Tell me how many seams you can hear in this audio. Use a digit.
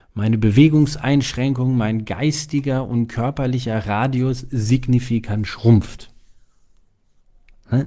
0